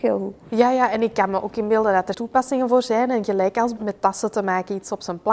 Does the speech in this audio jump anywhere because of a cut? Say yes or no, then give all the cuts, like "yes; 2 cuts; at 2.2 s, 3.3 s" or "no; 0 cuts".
yes; 2 cuts; at 2.1 s, 3.8 s